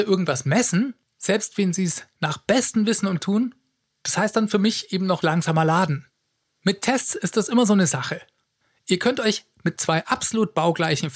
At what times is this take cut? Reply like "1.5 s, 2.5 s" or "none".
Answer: 3.2 s, 5.2 s